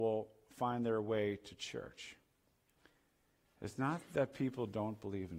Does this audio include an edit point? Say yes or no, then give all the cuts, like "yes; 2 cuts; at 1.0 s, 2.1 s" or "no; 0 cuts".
no; 0 cuts